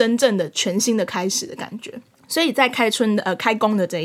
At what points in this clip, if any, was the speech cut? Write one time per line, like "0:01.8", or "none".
none